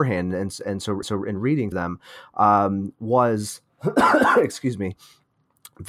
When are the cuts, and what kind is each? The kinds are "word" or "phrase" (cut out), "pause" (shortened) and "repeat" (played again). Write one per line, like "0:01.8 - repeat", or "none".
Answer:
0:01.0 - repeat
0:01.7 - word